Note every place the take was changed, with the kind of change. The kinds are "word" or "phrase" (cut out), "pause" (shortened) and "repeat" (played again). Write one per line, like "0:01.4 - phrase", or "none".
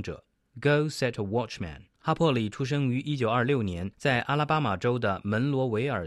0:01.9 - pause
0:03.9 - pause